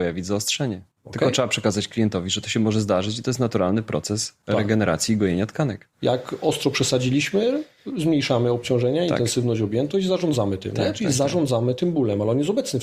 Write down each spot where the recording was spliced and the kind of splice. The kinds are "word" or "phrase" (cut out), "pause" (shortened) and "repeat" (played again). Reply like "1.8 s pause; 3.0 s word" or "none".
0.9 s pause

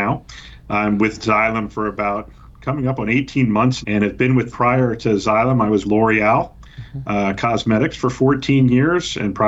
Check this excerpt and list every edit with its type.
3.8 s word; 4.5 s word; 5.8 s word

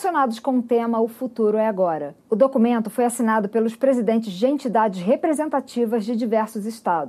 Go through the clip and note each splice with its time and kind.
2.2 s pause

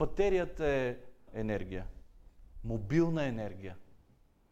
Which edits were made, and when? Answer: 1.3 s word

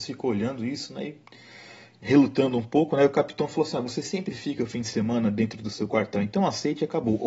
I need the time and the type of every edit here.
none

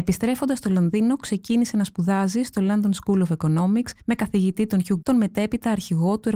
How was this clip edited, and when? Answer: 4.0 s pause; 5.0 s word

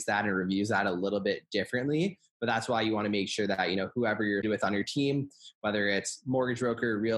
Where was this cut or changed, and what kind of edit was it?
4.4 s word

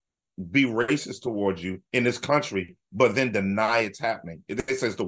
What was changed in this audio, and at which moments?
1.9 s pause

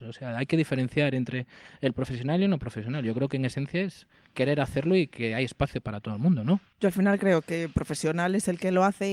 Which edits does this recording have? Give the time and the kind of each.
none

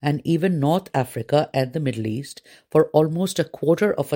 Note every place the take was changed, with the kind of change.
none

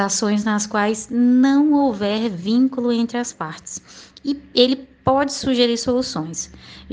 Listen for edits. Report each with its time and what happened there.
none

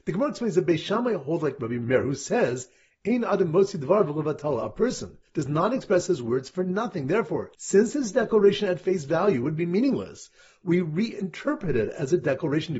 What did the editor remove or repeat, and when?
5.3 s pause; 7.5 s pause

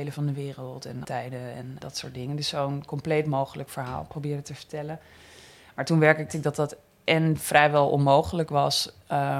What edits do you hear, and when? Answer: 1.0 s word; 1.8 s word; 6.3 s word

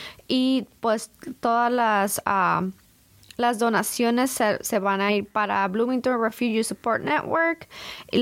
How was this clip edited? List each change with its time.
none

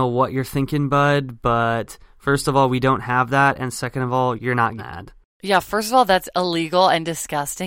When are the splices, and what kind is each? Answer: 4.8 s word

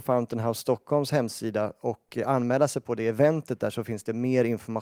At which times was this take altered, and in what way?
none

